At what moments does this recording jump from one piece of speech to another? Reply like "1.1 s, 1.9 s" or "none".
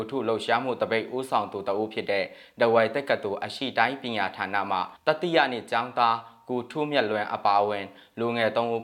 5.0 s